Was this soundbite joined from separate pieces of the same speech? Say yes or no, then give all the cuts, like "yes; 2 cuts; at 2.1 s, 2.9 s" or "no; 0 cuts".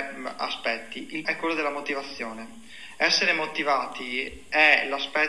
yes; 1 cut; at 1.2 s